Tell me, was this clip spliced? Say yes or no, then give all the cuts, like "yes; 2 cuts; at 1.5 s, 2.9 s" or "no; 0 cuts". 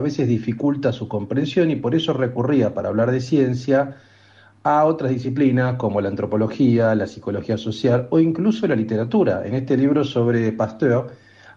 no; 0 cuts